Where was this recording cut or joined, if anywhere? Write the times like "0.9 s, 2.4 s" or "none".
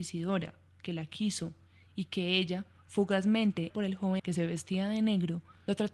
3.7 s, 4.2 s